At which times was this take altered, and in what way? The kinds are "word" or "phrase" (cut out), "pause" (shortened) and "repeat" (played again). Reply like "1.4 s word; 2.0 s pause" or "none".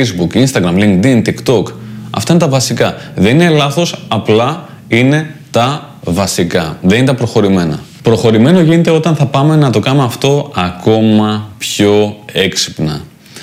none